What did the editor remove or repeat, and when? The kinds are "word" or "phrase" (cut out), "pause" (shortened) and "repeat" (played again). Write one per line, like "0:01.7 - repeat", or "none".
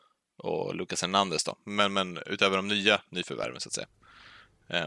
none